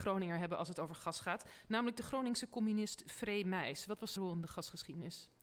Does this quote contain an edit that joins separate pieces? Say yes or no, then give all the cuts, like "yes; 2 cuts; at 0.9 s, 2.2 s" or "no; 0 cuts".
yes; 1 cut; at 4.2 s